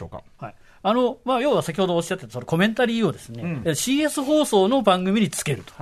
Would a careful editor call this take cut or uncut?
uncut